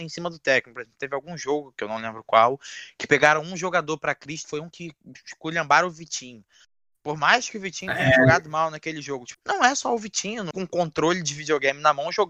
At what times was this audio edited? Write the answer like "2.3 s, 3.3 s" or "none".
4.4 s, 9.3 s, 10.5 s